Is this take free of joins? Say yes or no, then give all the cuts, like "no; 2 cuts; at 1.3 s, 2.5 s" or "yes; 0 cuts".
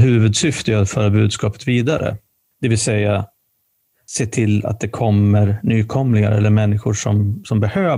yes; 0 cuts